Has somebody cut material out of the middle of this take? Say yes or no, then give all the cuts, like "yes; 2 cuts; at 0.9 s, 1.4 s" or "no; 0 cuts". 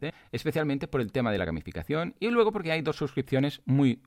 no; 0 cuts